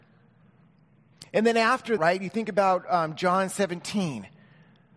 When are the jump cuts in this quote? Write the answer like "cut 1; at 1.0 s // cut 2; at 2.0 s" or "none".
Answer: cut 1; at 2.0 s